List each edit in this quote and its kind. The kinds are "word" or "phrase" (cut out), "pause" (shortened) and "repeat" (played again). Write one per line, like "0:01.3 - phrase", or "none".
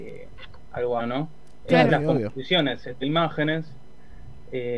0:01.0 - word
0:01.9 - phrase
0:03.0 - word